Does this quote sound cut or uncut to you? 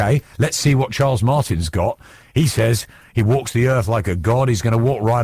uncut